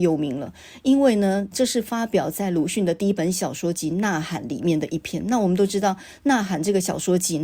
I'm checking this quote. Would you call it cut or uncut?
cut